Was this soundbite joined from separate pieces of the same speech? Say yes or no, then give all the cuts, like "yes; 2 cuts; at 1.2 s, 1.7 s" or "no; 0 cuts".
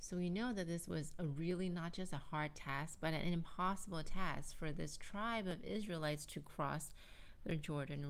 no; 0 cuts